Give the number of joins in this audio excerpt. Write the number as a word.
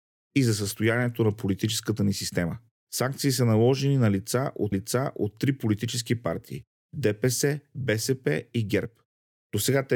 one